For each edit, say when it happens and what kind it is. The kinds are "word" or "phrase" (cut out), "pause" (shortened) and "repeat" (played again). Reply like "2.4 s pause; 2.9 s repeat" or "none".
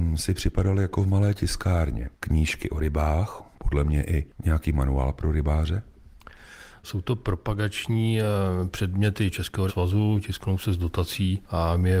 9.7 s word